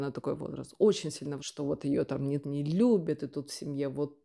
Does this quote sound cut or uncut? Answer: cut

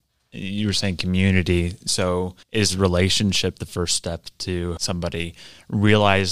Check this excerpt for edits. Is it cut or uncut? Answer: cut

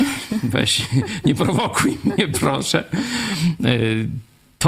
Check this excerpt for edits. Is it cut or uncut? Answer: uncut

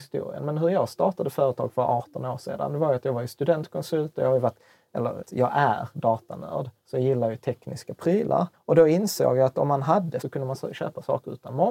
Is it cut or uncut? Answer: cut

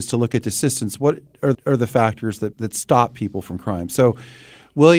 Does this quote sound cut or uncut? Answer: cut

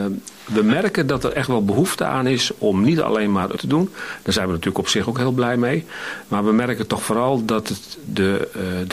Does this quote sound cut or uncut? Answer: cut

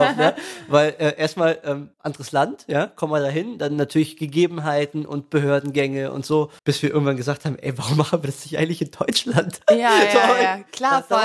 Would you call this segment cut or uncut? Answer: cut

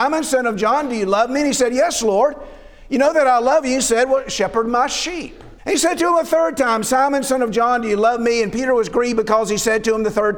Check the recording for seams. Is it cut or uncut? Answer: cut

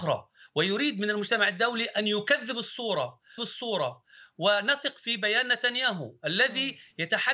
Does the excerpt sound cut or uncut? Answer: cut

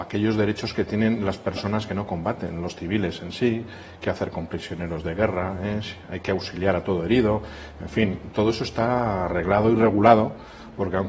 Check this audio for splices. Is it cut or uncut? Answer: uncut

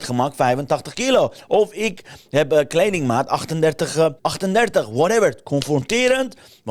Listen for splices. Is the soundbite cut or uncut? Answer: cut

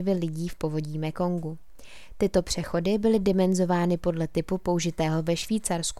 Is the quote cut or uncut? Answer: uncut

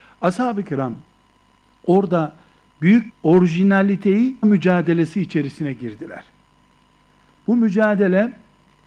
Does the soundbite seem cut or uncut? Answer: cut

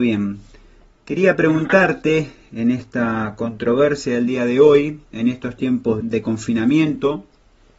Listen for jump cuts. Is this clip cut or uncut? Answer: cut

